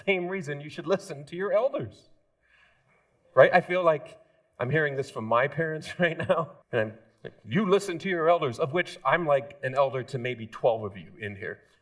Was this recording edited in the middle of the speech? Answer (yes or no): yes